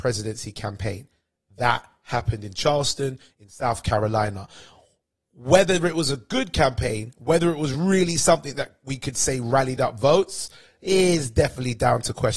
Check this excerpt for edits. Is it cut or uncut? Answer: uncut